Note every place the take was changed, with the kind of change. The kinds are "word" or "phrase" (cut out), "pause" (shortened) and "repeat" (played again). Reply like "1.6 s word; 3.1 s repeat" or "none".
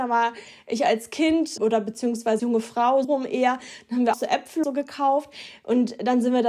1.6 s word; 2.4 s word; 3.0 s word; 4.1 s word; 4.6 s word